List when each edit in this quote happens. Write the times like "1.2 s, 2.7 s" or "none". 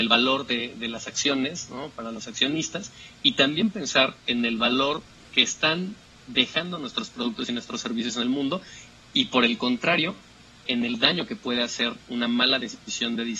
10.7 s